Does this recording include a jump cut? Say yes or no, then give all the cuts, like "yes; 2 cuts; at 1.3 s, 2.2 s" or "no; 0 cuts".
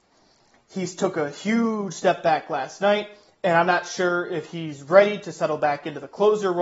no; 0 cuts